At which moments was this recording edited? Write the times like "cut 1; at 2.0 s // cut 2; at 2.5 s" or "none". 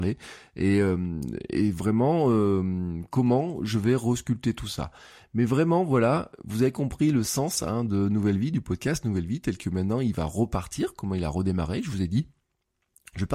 none